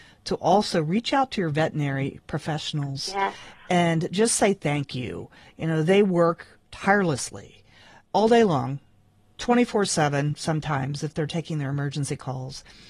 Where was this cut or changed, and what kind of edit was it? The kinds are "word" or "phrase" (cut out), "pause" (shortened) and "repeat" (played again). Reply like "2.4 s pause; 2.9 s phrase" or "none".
none